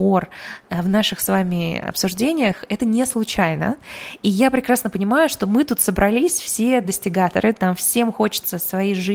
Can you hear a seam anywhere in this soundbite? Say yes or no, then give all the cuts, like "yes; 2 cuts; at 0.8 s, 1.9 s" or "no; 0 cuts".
no; 0 cuts